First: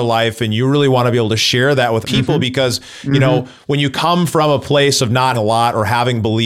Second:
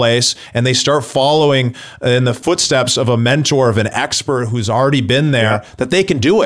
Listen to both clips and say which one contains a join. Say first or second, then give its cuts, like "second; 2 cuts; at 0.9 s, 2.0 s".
first; 2 cuts; at 2.0 s, 5.3 s